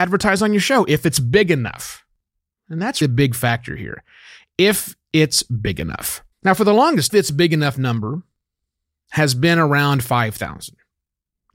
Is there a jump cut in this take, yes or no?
yes